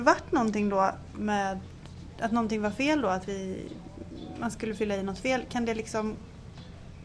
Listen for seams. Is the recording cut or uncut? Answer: cut